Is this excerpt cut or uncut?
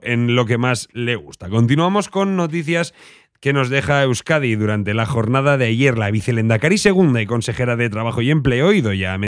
uncut